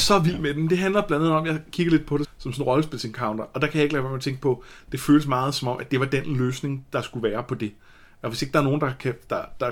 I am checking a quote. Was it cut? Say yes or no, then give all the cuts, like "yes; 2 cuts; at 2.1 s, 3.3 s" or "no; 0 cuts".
yes; 1 cut; at 2.2 s